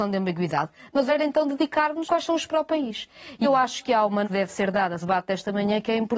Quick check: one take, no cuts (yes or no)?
no